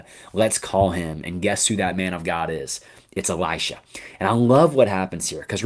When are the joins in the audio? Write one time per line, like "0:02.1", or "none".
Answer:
none